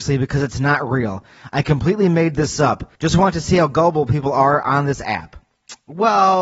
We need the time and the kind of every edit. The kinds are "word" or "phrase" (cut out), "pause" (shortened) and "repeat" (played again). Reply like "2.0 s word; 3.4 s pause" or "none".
3.0 s pause